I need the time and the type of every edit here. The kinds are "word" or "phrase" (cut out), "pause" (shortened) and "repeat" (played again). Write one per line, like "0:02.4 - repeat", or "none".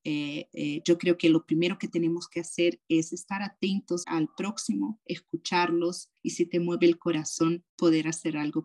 0:04.0 - word
0:06.2 - pause
0:07.7 - pause